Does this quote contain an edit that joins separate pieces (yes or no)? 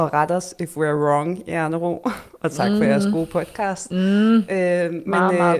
no